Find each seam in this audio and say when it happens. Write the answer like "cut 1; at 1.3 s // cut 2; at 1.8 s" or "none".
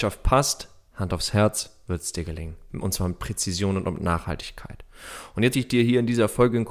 cut 1; at 5.5 s